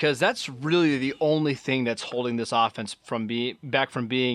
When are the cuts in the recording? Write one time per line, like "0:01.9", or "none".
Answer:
none